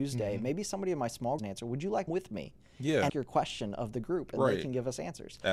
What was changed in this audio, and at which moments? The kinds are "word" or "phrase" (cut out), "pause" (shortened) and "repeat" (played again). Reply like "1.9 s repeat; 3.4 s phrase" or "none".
1.4 s phrase; 2.1 s phrase; 3.1 s phrase